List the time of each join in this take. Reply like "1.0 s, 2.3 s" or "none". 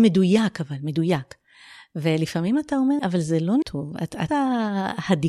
3.0 s, 3.6 s, 4.3 s